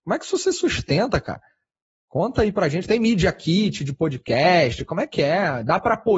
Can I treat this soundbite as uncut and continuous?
yes; 0 cuts

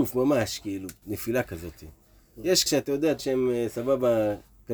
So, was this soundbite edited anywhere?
yes; 4 cuts; at 1.0 s, 1.4 s, 2.7 s, 3.2 s

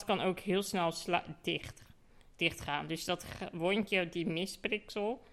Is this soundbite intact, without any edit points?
yes; 0 cuts

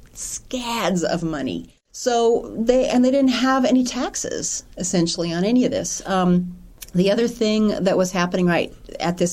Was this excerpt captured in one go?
yes; 0 cuts

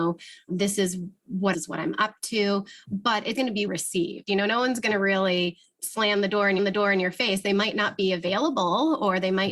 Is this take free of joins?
no; 4 cuts; at 1.5 s, 3.3 s, 3.7 s, 6.6 s

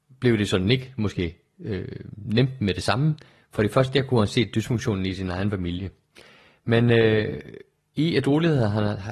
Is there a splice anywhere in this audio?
no; 0 cuts

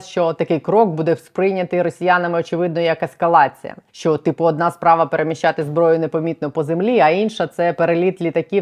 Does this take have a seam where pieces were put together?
yes; 1 cut; at 3.9 s

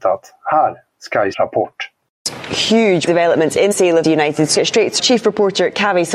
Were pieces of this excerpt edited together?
yes; 6 cuts; at 1.3 s, 3.1 s, 3.7 s, 4.0 s, 4.5 s, 5.0 s

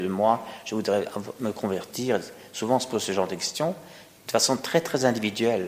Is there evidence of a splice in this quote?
no; 0 cuts

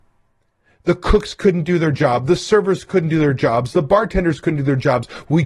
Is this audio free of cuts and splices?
yes; 0 cuts

